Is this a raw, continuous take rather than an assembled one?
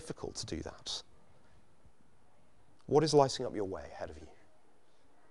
yes; 0 cuts

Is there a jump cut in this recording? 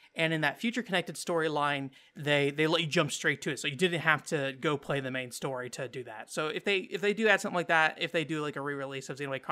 no; 0 cuts

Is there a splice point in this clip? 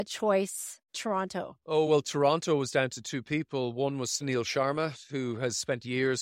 no; 0 cuts

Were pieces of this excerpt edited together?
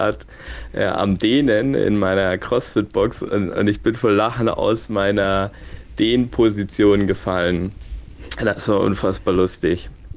no; 0 cuts

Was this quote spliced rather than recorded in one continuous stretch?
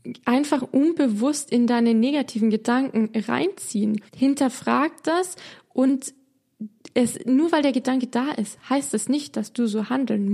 yes; 1 cut; at 4.1 s

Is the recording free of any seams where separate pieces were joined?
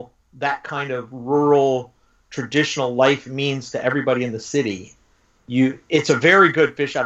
yes; 0 cuts

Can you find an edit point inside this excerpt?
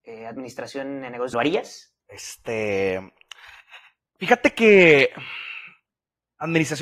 yes; 2 cuts; at 1.3 s, 2.0 s

